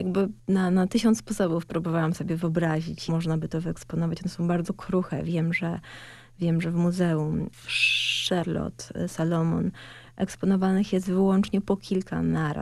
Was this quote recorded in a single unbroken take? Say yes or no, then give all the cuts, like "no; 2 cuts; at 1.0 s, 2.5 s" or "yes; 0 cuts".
no; 1 cut; at 3.1 s